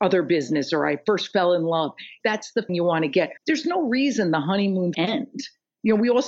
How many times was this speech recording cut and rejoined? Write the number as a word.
three